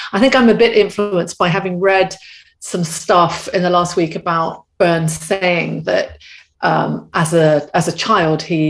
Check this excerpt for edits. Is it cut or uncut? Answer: uncut